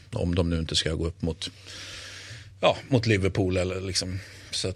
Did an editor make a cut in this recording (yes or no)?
no